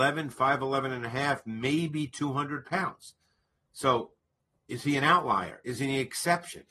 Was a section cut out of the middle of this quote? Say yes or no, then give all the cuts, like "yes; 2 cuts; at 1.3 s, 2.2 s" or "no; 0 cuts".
no; 0 cuts